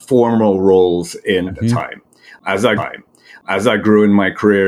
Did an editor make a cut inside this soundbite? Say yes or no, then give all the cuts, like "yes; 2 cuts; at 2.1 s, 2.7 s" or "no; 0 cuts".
yes; 2 cuts; at 1.5 s, 2.8 s